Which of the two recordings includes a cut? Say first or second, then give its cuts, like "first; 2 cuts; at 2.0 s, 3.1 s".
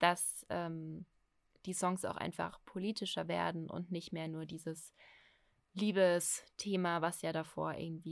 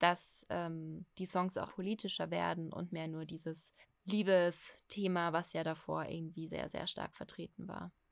second; 5 cuts; at 1.1 s, 1.7 s, 2.9 s, 3.8 s, 6.5 s